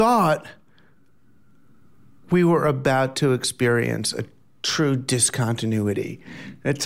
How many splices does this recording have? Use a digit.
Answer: 0